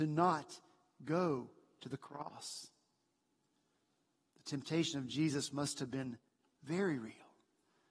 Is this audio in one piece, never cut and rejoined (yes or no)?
yes